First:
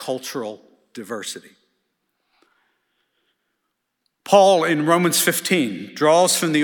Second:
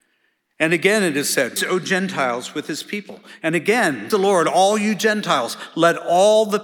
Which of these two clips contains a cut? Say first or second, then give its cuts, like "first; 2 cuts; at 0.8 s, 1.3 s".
second; 2 cuts; at 1.6 s, 4.1 s